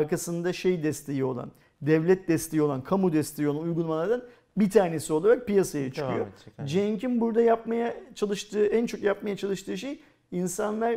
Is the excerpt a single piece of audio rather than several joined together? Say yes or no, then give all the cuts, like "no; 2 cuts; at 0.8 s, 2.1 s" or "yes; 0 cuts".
yes; 0 cuts